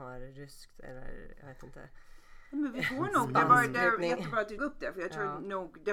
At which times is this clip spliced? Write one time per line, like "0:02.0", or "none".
0:04.6